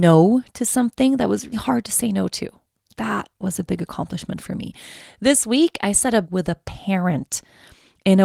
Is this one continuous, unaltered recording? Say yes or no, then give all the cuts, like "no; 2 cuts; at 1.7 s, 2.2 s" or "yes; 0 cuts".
no; 2 cuts; at 1.5 s, 6.2 s